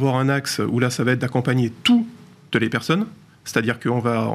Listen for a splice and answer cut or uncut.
uncut